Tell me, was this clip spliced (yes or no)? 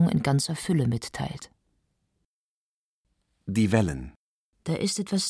no